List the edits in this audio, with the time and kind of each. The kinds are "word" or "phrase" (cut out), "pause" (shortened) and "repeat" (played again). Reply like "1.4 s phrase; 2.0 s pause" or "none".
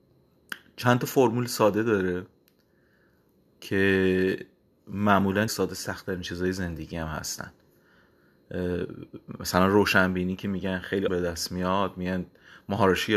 5.5 s word; 11.1 s word